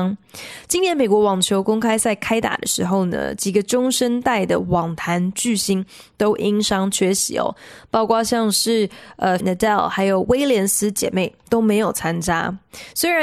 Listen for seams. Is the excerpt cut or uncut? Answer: cut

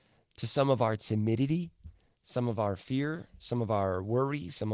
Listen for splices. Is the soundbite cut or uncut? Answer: uncut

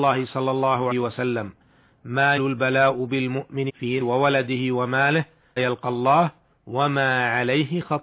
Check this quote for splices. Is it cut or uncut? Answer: cut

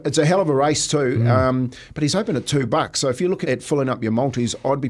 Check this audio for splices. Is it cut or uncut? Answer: cut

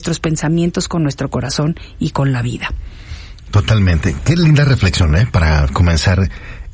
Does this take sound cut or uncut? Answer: uncut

